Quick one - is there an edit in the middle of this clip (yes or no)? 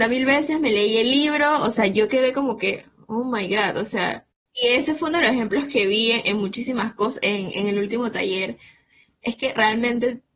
no